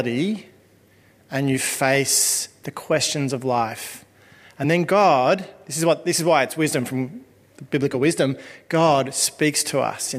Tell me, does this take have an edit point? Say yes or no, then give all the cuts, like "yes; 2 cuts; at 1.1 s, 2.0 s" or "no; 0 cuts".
no; 0 cuts